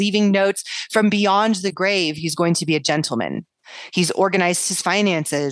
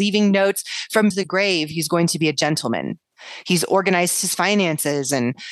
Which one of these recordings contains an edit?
second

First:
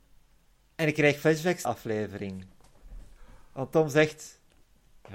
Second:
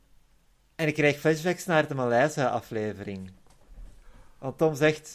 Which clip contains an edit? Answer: first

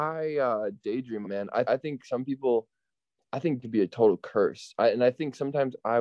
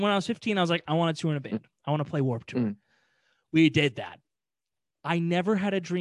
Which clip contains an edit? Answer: first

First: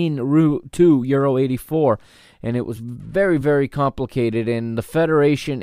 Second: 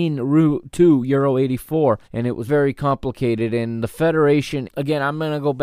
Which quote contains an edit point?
second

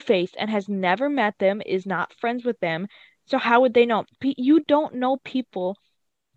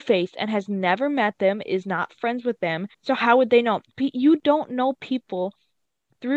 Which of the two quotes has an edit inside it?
second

